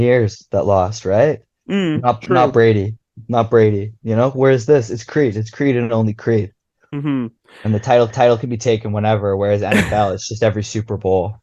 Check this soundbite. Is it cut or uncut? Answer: cut